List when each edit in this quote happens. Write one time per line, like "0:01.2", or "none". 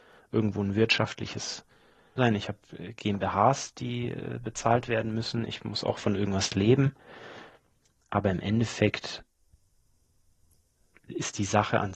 0:02.2